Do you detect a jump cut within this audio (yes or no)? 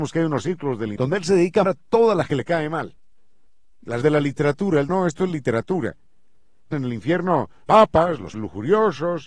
yes